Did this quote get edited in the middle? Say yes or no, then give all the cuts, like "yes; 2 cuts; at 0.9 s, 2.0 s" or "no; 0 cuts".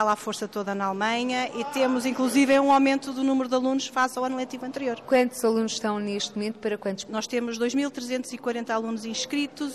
no; 0 cuts